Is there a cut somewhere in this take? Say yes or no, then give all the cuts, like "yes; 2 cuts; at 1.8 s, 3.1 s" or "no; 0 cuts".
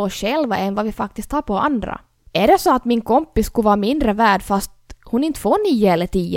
no; 0 cuts